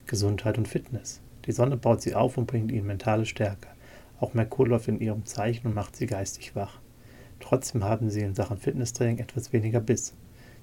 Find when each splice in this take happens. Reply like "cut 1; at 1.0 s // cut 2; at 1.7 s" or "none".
none